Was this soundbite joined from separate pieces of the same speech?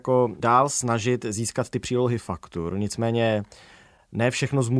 no; 0 cuts

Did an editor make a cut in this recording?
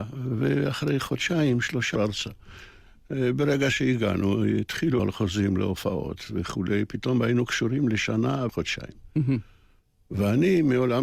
yes; 3 cuts; at 2.0 s, 5.0 s, 8.5 s

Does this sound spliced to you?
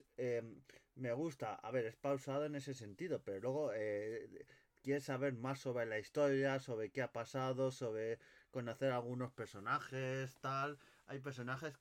no; 0 cuts

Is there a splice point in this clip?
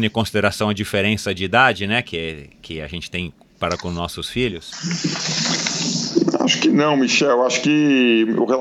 no; 0 cuts

